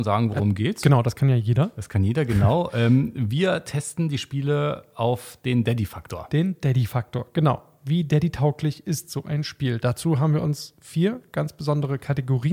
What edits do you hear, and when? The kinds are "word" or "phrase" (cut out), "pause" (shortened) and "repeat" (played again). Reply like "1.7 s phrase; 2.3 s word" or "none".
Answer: none